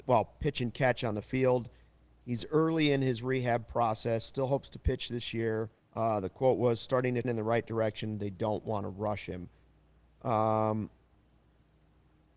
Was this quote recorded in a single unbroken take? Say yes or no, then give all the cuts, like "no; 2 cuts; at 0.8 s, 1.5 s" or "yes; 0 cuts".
no; 2 cuts; at 5.8 s, 7.2 s